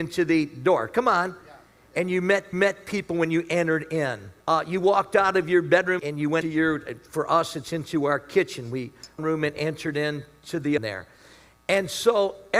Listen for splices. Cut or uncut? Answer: cut